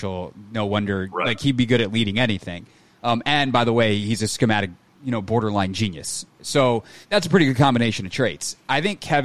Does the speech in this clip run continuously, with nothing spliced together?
no; 1 cut; at 7.0 s

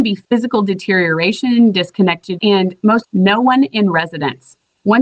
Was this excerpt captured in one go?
no; 2 cuts; at 2.4 s, 3.0 s

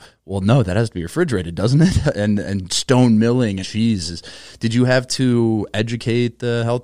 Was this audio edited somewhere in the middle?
yes; 1 cut; at 3.6 s

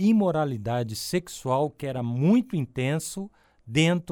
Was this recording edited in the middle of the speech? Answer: no; 0 cuts

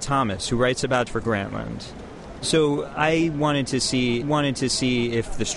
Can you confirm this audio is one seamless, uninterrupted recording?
no; 2 cuts; at 1.1 s, 4.2 s

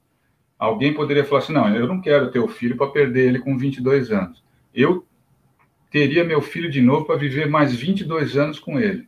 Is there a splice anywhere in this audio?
no; 0 cuts

